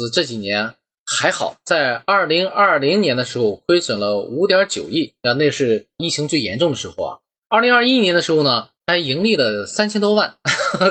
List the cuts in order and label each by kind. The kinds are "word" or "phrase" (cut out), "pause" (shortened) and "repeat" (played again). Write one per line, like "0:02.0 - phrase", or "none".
0:05.2 - pause
0:08.7 - pause